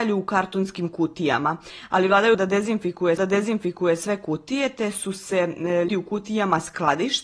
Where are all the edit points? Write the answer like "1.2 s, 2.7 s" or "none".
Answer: 2.3 s, 3.2 s, 5.9 s